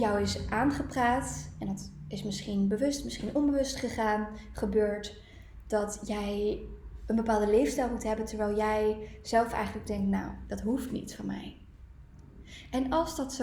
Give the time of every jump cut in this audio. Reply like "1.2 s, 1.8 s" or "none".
none